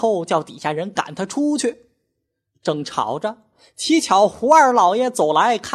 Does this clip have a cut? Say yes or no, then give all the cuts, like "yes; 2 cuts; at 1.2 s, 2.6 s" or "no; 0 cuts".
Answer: no; 0 cuts